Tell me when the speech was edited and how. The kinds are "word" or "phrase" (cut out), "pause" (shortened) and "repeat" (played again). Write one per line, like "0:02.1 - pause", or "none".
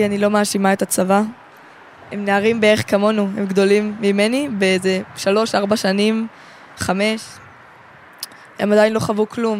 none